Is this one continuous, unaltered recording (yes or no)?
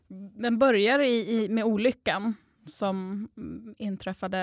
yes